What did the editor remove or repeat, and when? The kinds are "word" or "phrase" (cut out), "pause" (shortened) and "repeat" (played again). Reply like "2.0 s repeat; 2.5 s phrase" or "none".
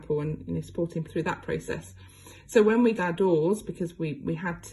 1.1 s word; 3.0 s word